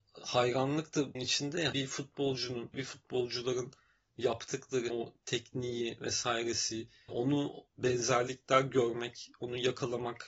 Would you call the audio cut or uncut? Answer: cut